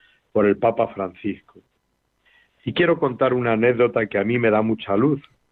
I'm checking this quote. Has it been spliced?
no; 0 cuts

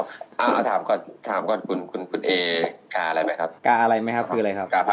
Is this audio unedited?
no; 1 cut; at 3.6 s

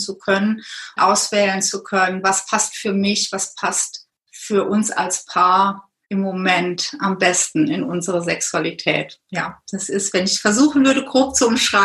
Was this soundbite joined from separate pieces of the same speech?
yes; 2 cuts; at 1.0 s, 6.0 s

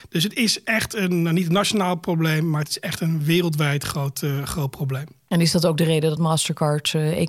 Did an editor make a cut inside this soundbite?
no; 0 cuts

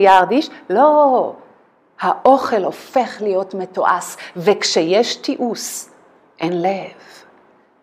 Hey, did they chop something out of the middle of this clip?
no; 0 cuts

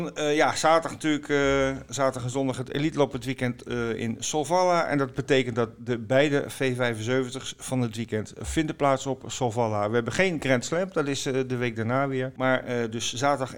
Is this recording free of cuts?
yes; 0 cuts

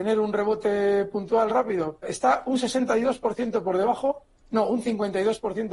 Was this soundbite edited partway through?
yes; 1 cut; at 2.0 s

